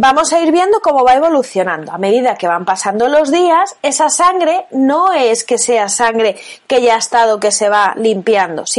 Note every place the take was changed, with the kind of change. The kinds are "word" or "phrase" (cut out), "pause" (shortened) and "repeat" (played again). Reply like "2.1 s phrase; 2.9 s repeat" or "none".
none

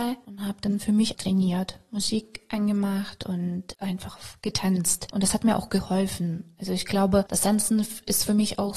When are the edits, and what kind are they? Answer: 1.1 s word

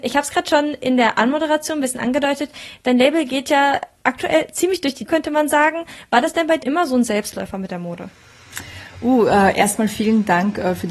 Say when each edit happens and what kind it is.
5.1 s word; 6.6 s word

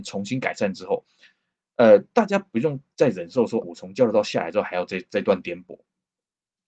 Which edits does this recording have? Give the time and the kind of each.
3.6 s word

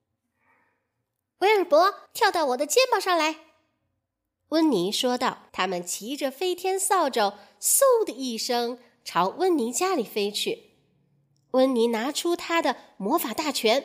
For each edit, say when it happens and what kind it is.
2.1 s pause; 5.5 s pause

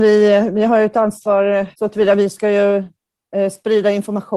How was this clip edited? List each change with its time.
1.7 s pause

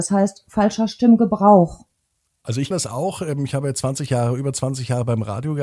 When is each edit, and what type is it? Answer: 2.7 s word

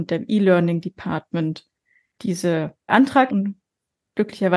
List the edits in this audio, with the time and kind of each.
2.9 s phrase; 3.3 s word

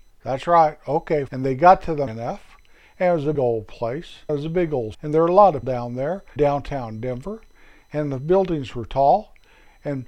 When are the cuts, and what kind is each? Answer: 1.3 s word; 2.1 s word; 3.3 s word; 4.3 s word; 4.9 s word; 5.6 s word; 6.4 s word

